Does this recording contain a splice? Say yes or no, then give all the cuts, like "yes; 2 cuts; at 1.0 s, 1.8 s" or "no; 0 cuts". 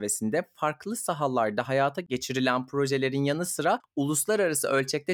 no; 0 cuts